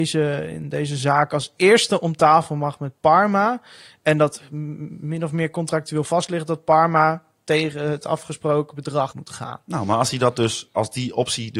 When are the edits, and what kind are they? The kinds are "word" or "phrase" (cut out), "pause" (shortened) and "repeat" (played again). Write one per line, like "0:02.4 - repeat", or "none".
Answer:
0:09.1 - word